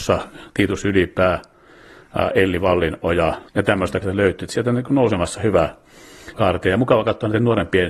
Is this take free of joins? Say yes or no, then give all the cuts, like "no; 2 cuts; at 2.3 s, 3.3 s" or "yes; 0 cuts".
no; 3 cuts; at 3.5 s, 4.0 s, 6.3 s